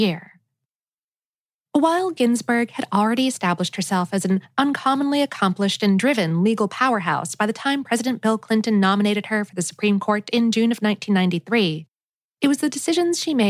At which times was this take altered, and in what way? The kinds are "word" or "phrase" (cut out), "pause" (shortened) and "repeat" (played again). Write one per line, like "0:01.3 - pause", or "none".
none